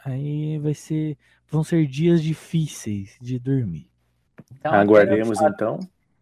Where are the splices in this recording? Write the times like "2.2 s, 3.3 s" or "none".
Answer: none